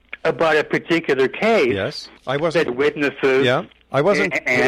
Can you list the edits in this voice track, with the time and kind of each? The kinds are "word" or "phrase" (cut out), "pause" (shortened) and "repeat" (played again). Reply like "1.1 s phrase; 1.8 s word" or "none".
2.2 s pause; 2.7 s phrase